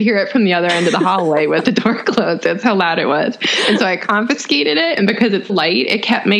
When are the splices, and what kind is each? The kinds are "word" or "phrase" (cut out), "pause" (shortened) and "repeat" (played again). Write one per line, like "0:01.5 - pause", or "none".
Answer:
0:05.5 - word